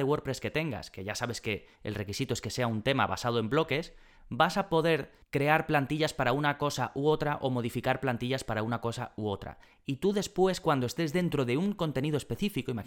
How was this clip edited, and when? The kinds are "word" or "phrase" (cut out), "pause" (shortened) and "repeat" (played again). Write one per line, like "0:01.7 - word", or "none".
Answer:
none

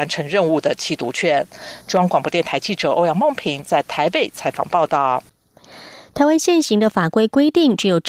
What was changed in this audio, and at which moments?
none

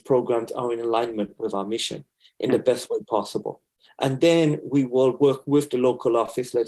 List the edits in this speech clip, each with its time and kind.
none

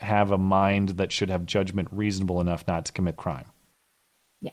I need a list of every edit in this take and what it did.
0:03.2 - phrase

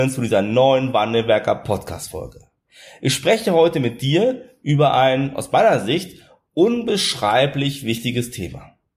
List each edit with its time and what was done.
none

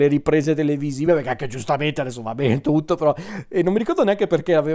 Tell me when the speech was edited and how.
none

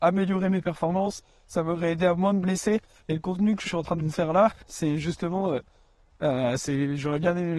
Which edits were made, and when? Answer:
0:03.6 - word

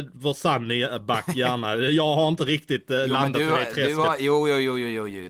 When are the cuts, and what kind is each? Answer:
none

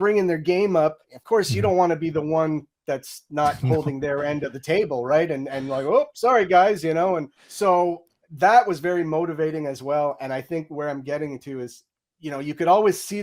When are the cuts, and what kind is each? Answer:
0:01.0 - pause
0:07.4 - pause

